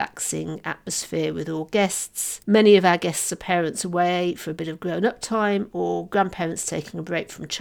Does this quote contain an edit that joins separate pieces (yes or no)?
no